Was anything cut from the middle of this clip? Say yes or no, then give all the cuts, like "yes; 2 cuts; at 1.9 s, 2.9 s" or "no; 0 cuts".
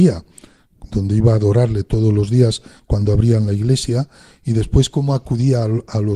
no; 0 cuts